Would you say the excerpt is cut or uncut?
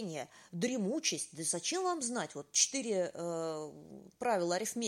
uncut